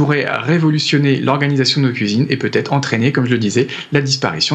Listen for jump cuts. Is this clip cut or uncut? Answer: uncut